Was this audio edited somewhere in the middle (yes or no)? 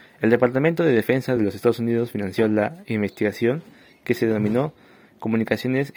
no